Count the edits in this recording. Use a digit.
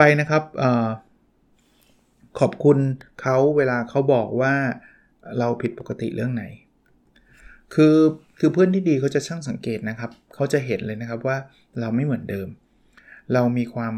0